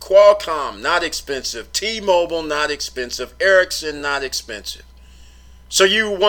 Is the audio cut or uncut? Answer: uncut